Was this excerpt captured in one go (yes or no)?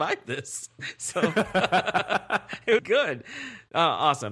no